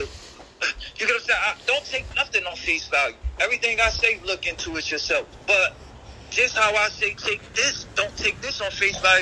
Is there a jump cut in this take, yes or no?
yes